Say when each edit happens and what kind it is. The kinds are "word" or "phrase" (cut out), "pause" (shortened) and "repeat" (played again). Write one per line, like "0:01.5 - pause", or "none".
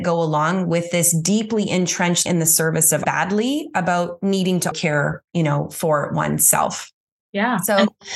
0:02.3 - phrase
0:03.0 - phrase
0:04.7 - word

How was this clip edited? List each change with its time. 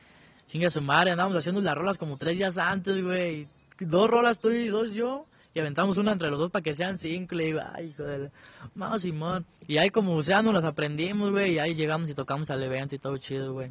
0:09.5 - pause

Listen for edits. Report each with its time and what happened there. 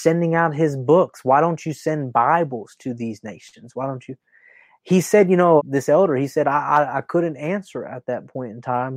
0:05.6 - word

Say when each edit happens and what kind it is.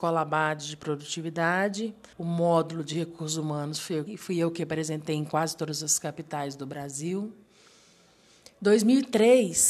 0:02.1 - pause
0:04.1 - word

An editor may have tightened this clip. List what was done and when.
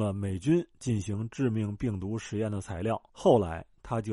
0:03.1 - pause

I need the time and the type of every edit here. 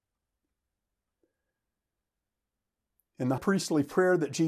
0:03.4 - word

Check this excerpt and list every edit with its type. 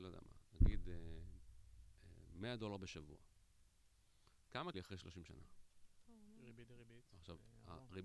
0:04.7 - phrase

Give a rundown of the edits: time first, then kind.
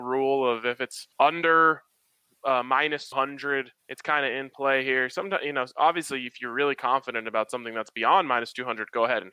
0:01.1 - pause
0:03.1 - word
0:03.8 - pause

